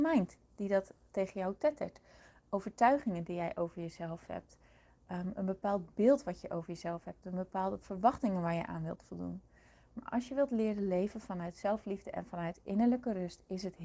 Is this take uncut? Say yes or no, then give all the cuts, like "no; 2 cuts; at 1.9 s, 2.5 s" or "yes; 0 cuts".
yes; 0 cuts